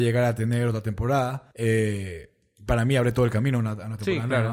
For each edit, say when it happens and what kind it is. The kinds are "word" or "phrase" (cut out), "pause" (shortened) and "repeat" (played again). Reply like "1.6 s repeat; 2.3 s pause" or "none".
1.5 s pause